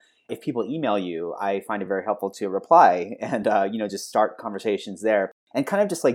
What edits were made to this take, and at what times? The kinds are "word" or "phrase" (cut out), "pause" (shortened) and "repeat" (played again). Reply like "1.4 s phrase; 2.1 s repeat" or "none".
none